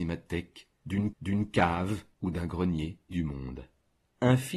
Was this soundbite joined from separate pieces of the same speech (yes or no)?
yes